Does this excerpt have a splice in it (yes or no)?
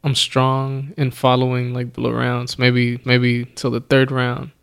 yes